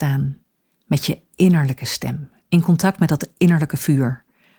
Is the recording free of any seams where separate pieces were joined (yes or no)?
yes